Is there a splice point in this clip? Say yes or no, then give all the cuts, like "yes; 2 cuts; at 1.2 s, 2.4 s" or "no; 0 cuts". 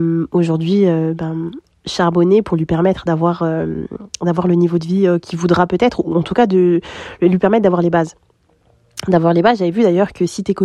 no; 0 cuts